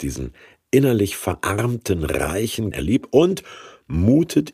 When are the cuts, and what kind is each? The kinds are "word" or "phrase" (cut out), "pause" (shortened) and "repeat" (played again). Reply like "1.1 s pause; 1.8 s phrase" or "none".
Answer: 2.7 s word